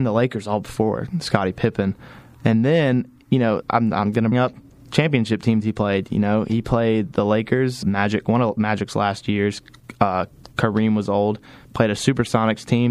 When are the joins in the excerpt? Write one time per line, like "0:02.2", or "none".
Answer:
0:03.6
0:04.3
0:07.8